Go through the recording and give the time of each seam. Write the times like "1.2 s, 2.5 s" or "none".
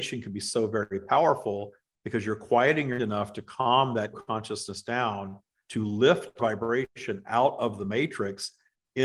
3.0 s, 4.1 s, 6.4 s